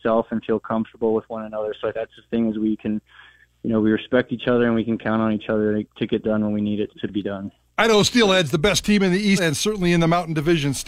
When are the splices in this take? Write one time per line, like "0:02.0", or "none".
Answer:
0:01.9
0:02.3
0:05.8
0:06.2
0:06.9
0:09.4